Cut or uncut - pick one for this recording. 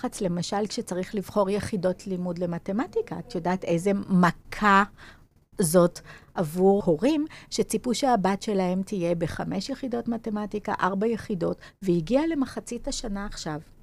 cut